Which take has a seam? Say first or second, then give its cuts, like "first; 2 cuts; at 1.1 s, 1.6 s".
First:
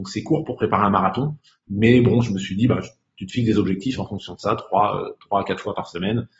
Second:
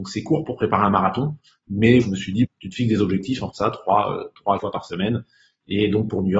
second; 4 cuts; at 2.0 s, 2.4 s, 3.5 s, 4.6 s